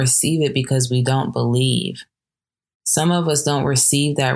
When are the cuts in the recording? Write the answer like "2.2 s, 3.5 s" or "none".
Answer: none